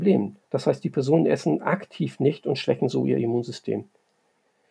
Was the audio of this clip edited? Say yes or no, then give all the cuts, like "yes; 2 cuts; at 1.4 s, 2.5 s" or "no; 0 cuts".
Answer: no; 0 cuts